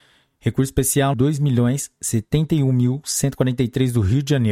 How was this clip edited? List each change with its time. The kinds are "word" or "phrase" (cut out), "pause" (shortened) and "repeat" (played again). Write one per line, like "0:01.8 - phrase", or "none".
0:01.1 - word